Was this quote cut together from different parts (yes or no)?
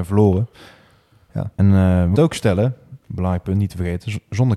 yes